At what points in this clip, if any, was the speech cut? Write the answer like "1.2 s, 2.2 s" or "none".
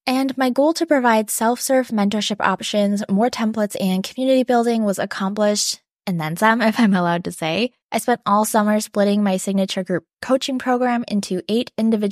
7.8 s